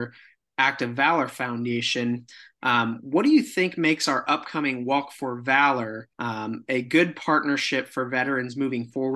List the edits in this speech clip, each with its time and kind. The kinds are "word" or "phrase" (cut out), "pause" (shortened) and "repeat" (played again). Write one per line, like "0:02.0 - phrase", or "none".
0:06.1 - pause